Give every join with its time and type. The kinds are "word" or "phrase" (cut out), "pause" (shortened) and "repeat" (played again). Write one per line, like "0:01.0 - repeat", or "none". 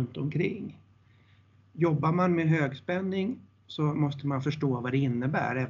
none